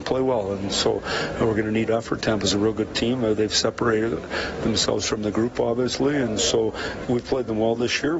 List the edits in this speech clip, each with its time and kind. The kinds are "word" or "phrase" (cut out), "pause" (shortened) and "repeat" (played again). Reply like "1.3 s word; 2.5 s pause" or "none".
1.9 s phrase; 7.0 s word